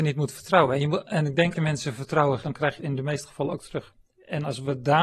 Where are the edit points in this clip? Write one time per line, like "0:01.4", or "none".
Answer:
0:01.5
0:02.4
0:02.8
0:04.0